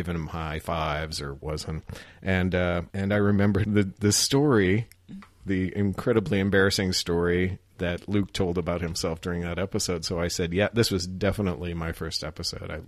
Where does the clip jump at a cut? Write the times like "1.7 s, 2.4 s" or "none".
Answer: 1.4 s, 2.9 s, 3.6 s, 7.7 s

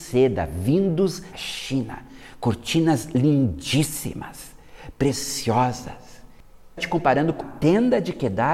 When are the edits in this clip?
1.3 s, 6.8 s, 7.4 s

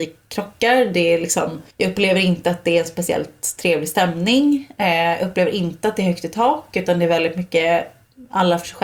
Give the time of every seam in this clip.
1.7 s

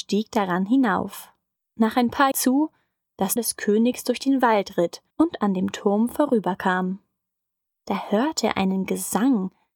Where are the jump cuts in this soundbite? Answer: 1.6 s, 2.3 s, 3.4 s, 5.1 s

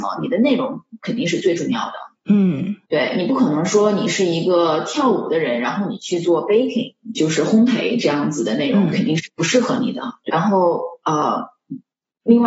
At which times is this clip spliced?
2.8 s, 7.1 s, 10.3 s

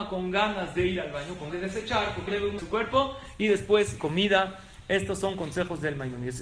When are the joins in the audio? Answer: 1.5 s, 2.3 s, 2.6 s, 4.0 s

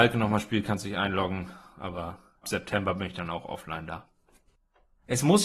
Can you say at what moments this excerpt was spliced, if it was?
2.4 s

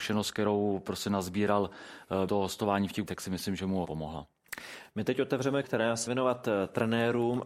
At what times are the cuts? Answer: 2.3 s, 3.1 s, 3.8 s, 5.6 s, 6.1 s

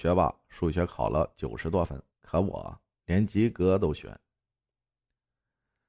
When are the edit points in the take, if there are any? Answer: 2.1 s, 2.9 s

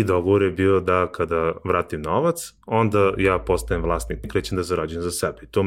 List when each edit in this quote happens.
4.2 s

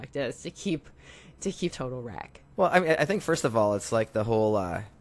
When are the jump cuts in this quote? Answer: 1.7 s, 2.5 s

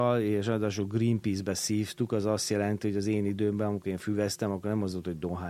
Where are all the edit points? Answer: none

